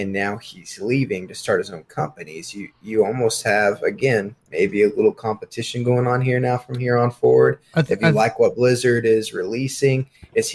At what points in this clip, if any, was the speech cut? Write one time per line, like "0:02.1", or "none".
0:02.7
0:04.4